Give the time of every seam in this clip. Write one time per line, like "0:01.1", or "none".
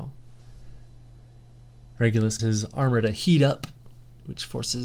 0:02.4